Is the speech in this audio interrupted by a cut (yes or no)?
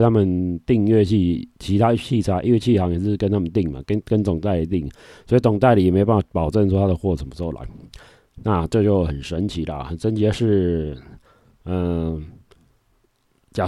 no